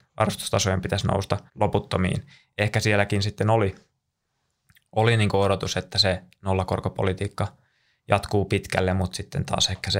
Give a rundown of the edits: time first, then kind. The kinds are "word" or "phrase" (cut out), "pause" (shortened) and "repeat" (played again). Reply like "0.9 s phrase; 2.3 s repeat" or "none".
1.5 s pause